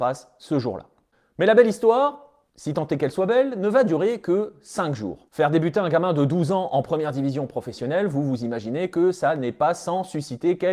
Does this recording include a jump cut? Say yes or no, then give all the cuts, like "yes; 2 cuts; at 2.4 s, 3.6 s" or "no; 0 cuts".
yes; 2 cuts; at 2.5 s, 5.3 s